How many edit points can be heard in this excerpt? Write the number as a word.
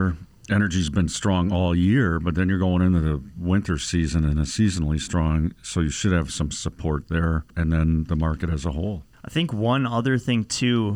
two